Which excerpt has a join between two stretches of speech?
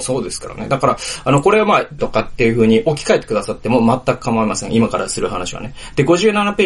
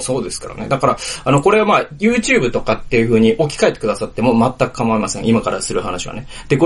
first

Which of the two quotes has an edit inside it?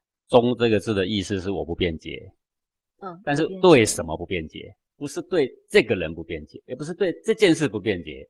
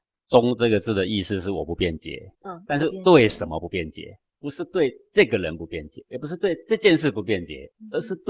second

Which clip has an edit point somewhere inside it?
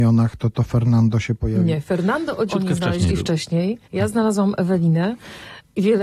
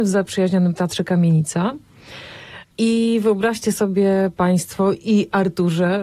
first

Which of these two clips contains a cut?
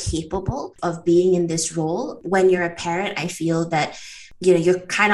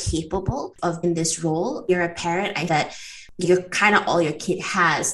second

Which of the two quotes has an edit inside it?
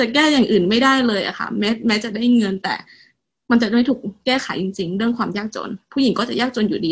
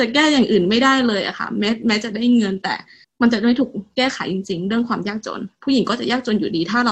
second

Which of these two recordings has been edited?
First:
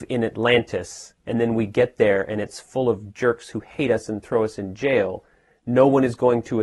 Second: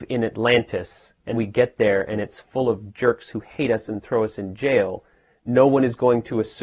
second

